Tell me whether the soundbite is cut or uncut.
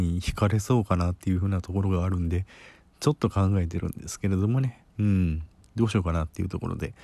cut